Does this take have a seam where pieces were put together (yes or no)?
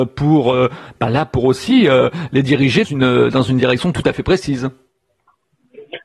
yes